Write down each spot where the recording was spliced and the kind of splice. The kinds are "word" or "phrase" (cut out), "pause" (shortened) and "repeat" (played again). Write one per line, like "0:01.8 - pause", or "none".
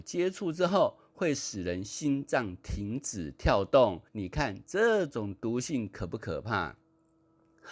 0:04.1 - pause